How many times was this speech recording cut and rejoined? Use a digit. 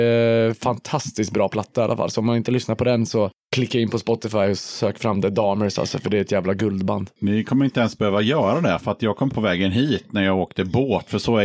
1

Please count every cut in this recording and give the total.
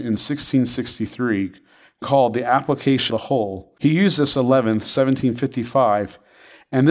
4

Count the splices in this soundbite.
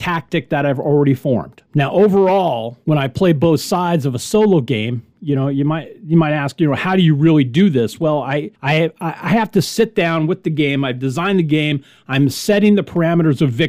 0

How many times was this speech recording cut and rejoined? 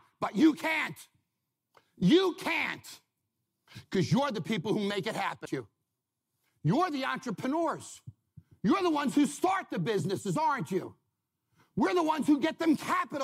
1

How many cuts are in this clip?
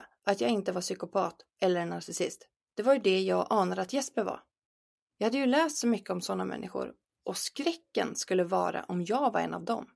0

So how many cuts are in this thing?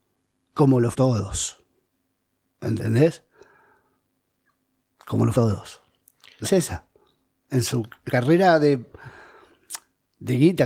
4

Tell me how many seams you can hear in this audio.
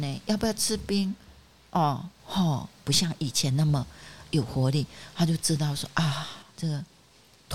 2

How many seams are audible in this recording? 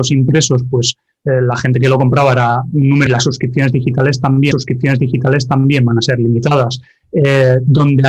2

